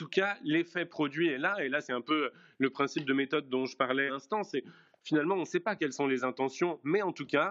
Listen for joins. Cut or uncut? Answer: cut